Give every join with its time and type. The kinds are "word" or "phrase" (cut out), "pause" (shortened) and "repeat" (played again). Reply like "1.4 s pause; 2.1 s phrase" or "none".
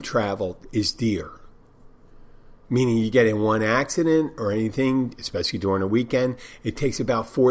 none